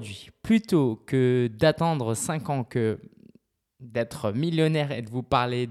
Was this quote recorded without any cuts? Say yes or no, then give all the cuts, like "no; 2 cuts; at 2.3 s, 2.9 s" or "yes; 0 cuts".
yes; 0 cuts